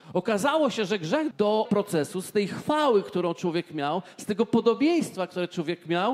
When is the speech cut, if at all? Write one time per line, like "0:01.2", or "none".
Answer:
0:01.3
0:01.6

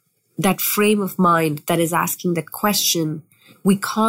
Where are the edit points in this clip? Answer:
none

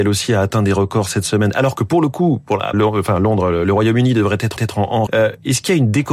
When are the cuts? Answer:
0:02.7
0:04.6
0:05.1

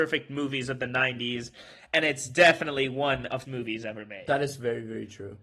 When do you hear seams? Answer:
0:03.4

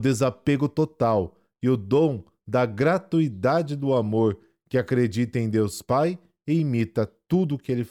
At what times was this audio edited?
none

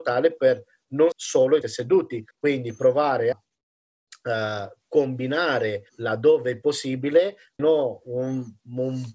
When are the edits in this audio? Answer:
0:01.1
0:01.6
0:02.3
0:03.3
0:05.9
0:07.6

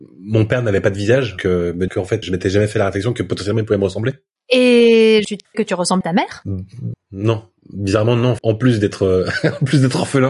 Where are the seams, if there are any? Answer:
0:01.4
0:01.9
0:02.2
0:05.5
0:06.0
0:06.9
0:08.4

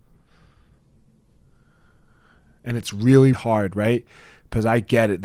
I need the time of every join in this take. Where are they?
0:03.3

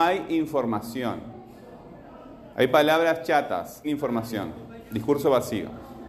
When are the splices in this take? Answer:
0:02.5
0:03.8

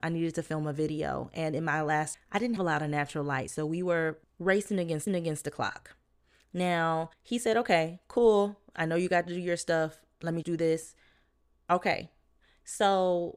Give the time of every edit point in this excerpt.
0:02.1
0:02.6
0:04.2
0:05.1
0:07.1
0:10.4

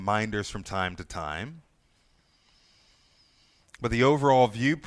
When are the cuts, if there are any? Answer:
none

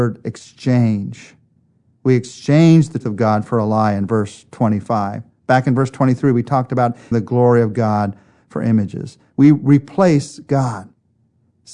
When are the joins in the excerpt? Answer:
0:03.0
0:07.1

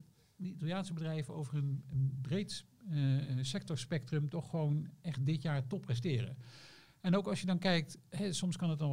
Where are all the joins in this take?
none

